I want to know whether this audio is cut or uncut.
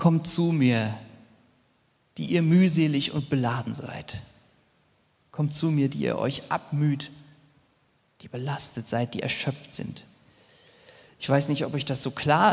uncut